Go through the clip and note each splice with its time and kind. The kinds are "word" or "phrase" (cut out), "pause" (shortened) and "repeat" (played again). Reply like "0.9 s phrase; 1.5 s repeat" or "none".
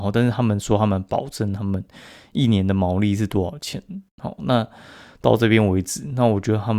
4.4 s word